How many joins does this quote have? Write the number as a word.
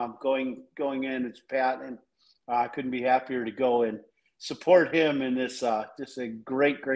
zero